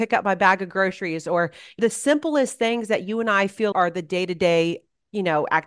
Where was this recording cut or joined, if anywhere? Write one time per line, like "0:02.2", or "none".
0:01.8
0:03.7